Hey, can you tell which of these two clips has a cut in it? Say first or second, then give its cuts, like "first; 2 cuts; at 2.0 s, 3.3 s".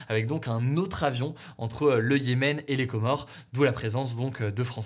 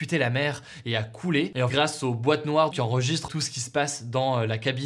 second; 3 cuts; at 1.7 s, 2.7 s, 3.3 s